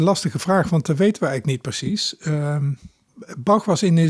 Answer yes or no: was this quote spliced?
no